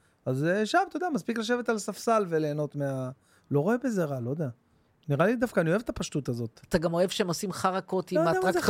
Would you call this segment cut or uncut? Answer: uncut